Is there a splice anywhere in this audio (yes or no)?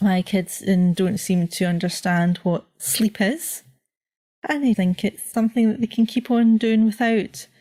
yes